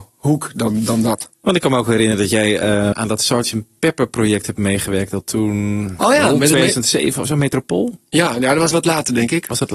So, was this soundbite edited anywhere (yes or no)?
yes